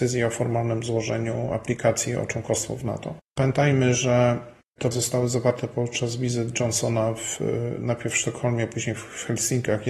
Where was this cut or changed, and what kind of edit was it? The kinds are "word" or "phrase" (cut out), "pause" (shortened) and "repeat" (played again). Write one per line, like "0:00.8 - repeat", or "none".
0:04.9 - word